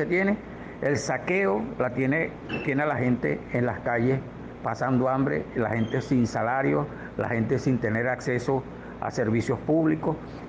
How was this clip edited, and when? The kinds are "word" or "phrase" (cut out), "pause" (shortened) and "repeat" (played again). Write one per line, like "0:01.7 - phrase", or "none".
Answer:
none

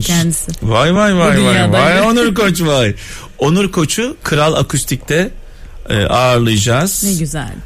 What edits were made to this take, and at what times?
none

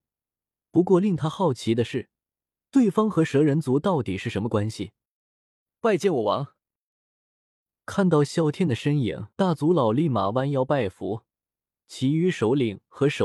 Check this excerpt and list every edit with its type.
0:09.3 - pause

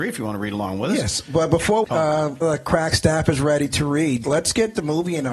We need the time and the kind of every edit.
0:01.8 - word
0:02.4 - word
0:04.2 - word

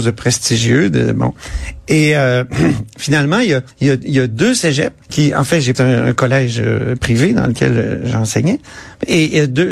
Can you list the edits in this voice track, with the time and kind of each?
0:03.7 - pause
0:05.0 - pause
0:05.7 - phrase

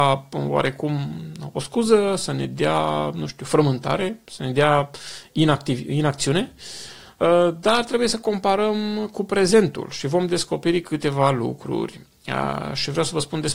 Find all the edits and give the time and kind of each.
none

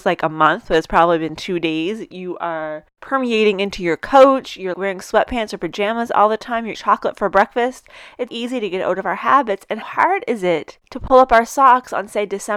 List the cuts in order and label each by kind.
0:04.7 - word
0:06.7 - word
0:08.3 - word
0:09.8 - word

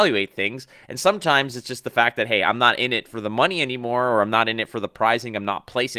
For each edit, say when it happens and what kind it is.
none

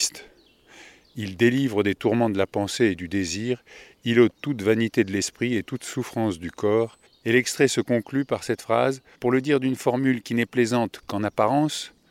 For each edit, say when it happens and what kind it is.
0:07.1 - pause
0:09.1 - pause

